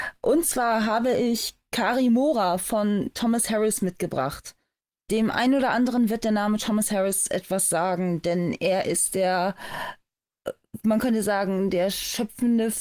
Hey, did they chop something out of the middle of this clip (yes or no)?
no